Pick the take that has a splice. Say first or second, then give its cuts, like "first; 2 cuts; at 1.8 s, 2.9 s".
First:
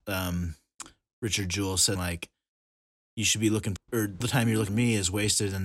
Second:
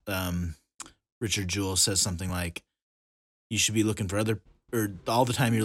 first; 4 cuts; at 2.0 s, 3.8 s, 4.2 s, 4.7 s